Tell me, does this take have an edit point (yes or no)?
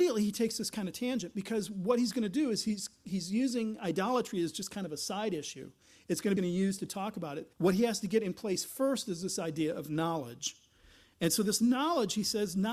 yes